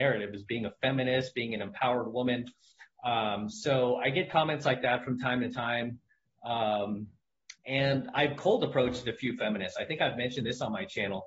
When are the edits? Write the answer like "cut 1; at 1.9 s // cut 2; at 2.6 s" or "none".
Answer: cut 1; at 7.6 s